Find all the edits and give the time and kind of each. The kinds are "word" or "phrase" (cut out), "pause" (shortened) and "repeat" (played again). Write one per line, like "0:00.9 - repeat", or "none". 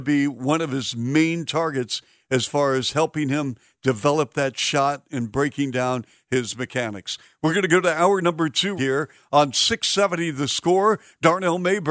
0:08.8 - word